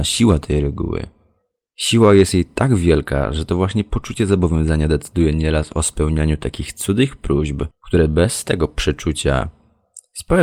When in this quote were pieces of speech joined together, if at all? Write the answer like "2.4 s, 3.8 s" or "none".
7.7 s